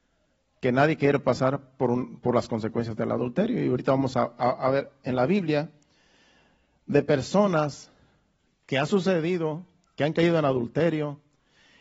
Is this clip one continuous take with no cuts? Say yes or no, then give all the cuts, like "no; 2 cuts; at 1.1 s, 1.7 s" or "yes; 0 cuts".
yes; 0 cuts